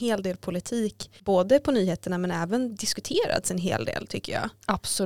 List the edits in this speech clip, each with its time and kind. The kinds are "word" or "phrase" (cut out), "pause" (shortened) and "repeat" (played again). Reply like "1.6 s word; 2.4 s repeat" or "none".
1.2 s pause